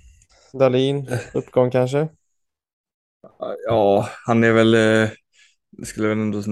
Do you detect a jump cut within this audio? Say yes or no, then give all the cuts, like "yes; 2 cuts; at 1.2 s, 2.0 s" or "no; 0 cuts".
no; 0 cuts